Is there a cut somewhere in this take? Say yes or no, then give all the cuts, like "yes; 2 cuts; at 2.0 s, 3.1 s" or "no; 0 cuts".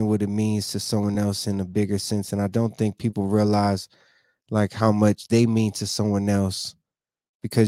no; 0 cuts